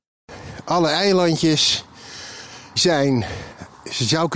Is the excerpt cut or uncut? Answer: cut